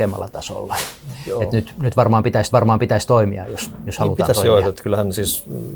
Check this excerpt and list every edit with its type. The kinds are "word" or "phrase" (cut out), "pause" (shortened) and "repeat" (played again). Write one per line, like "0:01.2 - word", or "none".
0:02.5 - repeat